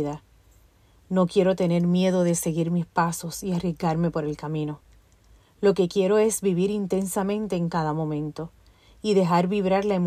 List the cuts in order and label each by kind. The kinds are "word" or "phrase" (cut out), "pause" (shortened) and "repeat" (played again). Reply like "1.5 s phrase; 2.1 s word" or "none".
none